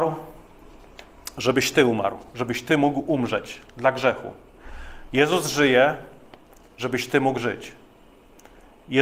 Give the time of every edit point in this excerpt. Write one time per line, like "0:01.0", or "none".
none